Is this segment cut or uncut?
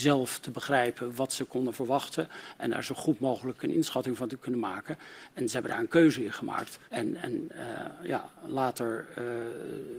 cut